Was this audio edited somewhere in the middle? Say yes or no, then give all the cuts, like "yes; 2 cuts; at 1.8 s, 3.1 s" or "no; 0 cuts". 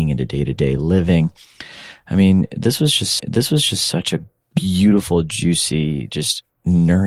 yes; 2 cuts; at 3.2 s, 4.4 s